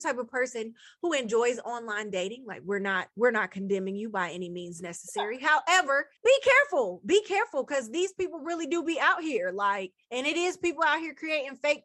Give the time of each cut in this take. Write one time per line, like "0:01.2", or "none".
0:06.2
0:10.0